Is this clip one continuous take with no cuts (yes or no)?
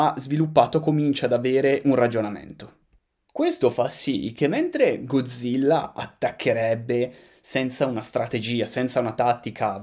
no